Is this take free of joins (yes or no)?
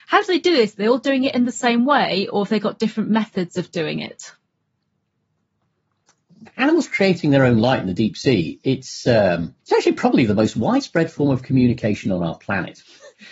no